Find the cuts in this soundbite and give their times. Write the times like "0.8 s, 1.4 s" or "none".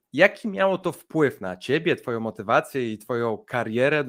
none